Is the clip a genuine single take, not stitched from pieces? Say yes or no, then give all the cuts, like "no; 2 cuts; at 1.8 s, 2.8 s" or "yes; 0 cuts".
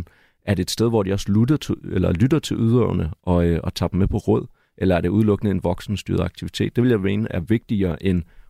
yes; 0 cuts